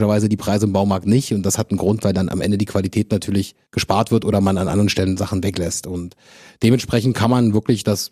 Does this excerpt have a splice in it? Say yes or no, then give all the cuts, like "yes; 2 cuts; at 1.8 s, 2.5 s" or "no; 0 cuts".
no; 0 cuts